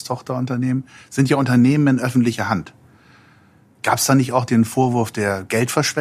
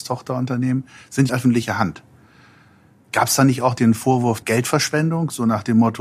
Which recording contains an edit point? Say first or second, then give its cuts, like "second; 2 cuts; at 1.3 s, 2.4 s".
second; 2 cuts; at 1.3 s, 4.4 s